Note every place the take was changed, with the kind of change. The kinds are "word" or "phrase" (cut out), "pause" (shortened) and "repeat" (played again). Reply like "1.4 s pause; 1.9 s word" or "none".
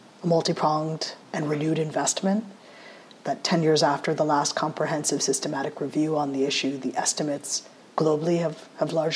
1.2 s pause